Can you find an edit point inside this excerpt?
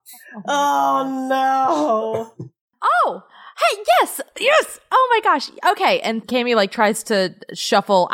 yes; 1 cut; at 6.2 s

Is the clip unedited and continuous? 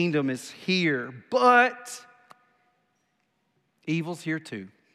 yes; 0 cuts

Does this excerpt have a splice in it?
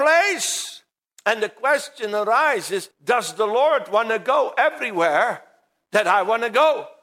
yes; 1 cut; at 2.9 s

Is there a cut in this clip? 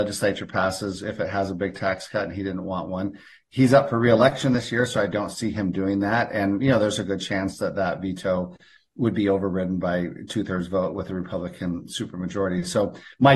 no; 0 cuts

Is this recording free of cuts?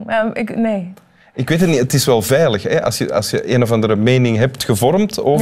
yes; 0 cuts

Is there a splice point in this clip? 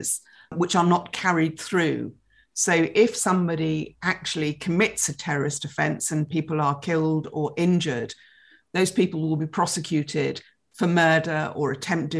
no; 0 cuts

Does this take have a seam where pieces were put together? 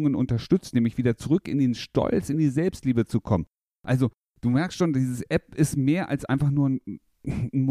no; 0 cuts

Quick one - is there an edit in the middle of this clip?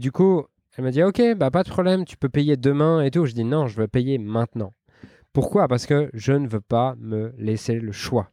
no; 0 cuts

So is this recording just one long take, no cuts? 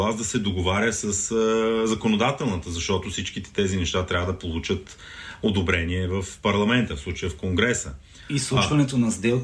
yes; 0 cuts

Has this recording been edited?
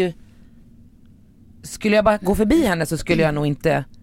no; 0 cuts

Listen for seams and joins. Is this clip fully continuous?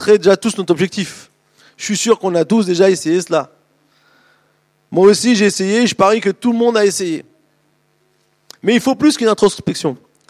yes; 0 cuts

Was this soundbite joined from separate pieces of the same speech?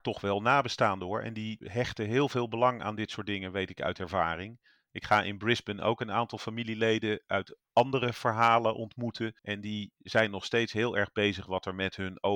yes; 1 cut; at 9.4 s

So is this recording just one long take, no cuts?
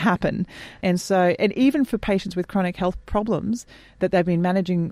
yes; 0 cuts

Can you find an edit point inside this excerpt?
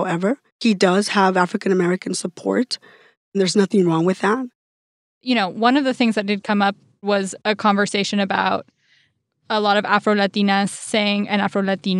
no; 0 cuts

